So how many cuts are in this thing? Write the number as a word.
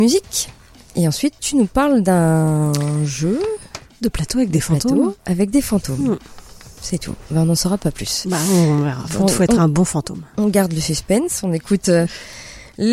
two